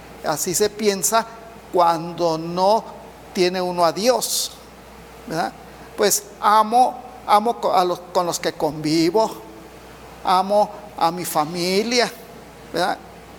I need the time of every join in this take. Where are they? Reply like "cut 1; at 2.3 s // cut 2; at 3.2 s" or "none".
none